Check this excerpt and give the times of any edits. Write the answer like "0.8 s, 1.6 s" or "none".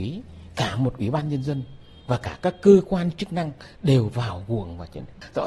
none

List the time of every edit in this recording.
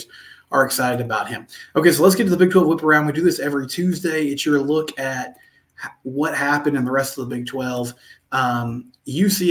none

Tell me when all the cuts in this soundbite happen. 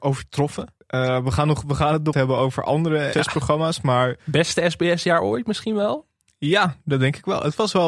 2.1 s, 3.1 s

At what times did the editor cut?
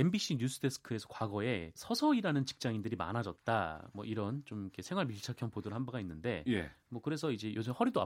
1.7 s

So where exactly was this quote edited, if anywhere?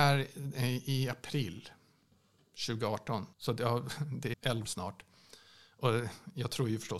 3.3 s, 4.3 s, 4.7 s

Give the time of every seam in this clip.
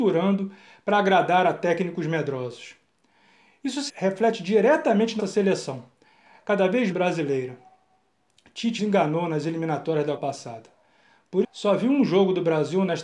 3.9 s, 5.2 s, 6.9 s, 8.8 s, 10.2 s, 11.4 s

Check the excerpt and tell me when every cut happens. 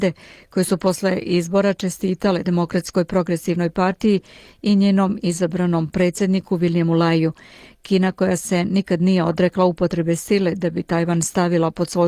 2.4 s

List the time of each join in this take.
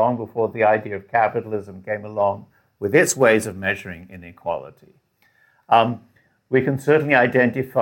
none

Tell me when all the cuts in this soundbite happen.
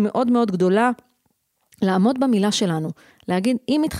none

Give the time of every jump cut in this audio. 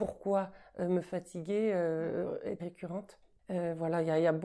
2.6 s

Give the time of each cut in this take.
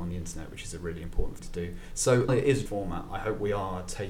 1.4 s, 2.3 s, 2.7 s

